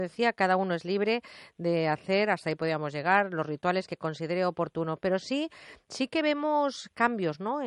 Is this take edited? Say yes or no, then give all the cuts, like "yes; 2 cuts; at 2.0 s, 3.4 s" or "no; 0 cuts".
no; 0 cuts